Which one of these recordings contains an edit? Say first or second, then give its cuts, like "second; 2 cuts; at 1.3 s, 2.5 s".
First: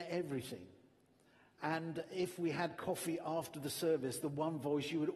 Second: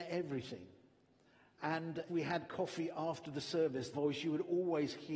second; 2 cuts; at 2.1 s, 3.9 s